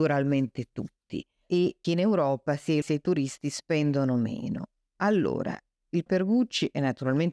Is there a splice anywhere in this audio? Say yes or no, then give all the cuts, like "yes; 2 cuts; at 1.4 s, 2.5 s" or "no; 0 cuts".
yes; 3 cuts; at 1.8 s, 2.8 s, 6.1 s